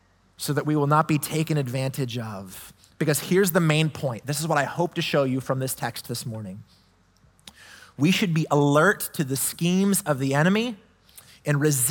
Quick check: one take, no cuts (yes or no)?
yes